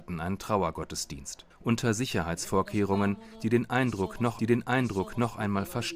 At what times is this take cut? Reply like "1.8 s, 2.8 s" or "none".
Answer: 1.5 s, 4.4 s